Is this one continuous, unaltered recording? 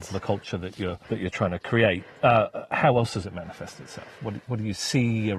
no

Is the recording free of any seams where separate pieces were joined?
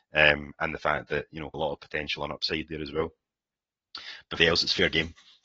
no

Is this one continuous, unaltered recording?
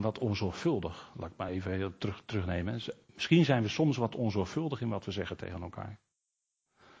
yes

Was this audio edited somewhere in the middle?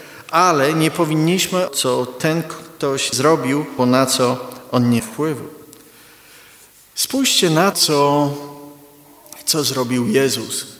yes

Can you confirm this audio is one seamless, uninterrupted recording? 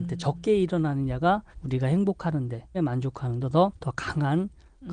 no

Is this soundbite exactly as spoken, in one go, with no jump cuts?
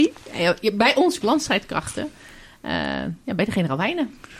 no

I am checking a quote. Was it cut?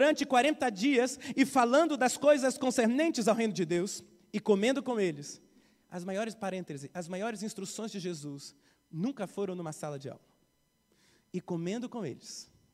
no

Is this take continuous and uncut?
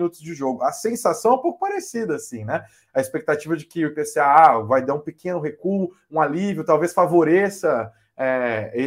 yes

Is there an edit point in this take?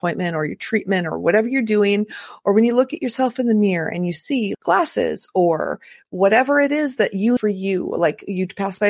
yes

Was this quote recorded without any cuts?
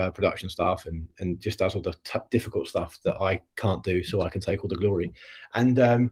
yes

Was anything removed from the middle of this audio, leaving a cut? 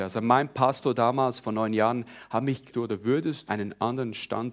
yes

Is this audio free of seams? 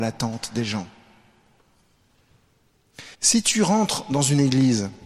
no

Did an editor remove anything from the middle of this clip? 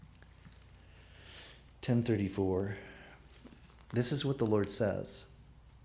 no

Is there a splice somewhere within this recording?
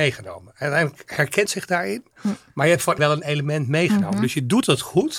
yes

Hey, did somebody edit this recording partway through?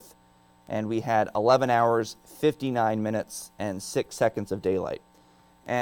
no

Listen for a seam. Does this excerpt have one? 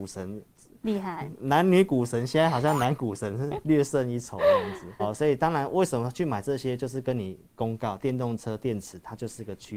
yes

